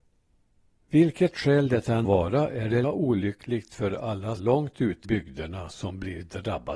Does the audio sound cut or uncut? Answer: cut